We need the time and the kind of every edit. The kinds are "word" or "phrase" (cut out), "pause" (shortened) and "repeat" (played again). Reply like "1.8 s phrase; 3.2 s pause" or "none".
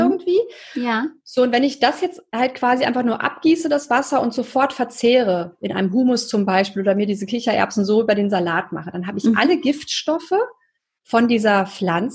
none